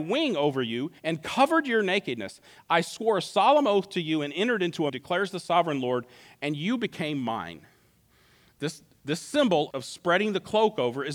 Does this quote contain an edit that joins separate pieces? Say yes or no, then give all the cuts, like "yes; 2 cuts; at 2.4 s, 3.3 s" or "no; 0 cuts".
yes; 3 cuts; at 1.0 s, 4.9 s, 9.7 s